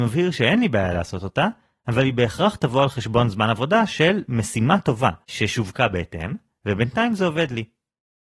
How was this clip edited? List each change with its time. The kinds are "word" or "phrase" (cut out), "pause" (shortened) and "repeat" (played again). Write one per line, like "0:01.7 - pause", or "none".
0:05.2 - pause